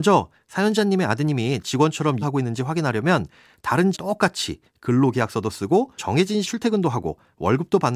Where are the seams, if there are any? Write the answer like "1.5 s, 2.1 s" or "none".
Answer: 1.6 s, 2.2 s, 3.9 s, 6.0 s, 6.4 s